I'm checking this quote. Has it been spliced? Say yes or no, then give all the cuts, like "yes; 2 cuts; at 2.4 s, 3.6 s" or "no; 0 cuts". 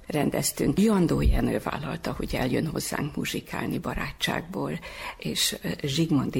no; 0 cuts